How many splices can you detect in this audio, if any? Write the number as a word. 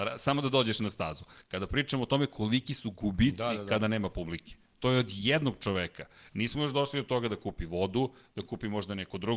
zero